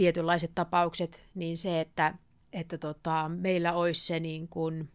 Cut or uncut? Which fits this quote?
uncut